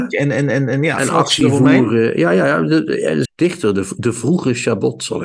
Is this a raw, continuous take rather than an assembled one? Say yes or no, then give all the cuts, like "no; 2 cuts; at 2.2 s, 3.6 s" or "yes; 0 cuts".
no; 2 cuts; at 1.0 s, 3.2 s